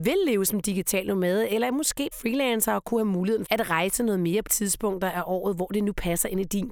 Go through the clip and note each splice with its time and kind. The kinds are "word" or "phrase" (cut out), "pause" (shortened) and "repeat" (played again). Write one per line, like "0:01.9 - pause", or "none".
0:02.1 - word
0:03.5 - word
0:04.5 - word